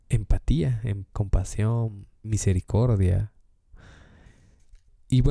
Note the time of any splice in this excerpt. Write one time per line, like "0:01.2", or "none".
0:01.1
0:02.2